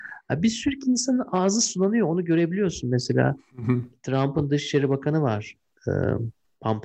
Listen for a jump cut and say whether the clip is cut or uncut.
uncut